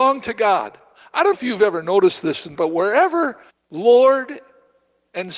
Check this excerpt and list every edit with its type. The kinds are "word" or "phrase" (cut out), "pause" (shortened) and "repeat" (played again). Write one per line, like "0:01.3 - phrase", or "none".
0:01.3 - word
0:02.5 - phrase
0:03.5 - pause